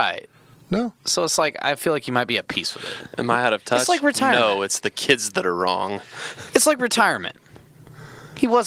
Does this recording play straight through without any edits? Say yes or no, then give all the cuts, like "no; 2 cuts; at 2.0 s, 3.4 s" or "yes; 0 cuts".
yes; 0 cuts